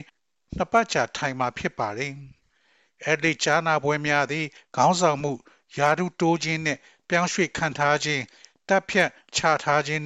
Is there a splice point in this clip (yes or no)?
no